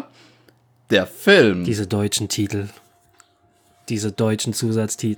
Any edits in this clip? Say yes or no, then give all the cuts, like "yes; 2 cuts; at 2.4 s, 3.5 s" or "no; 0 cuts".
no; 0 cuts